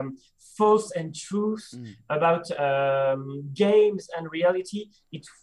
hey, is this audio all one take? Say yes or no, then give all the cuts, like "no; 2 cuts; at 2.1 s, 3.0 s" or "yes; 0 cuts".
yes; 0 cuts